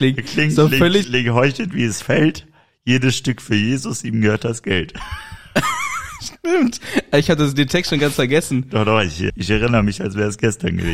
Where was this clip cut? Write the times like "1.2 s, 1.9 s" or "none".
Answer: 1.0 s, 9.3 s